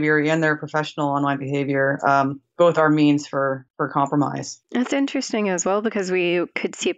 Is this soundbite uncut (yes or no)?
no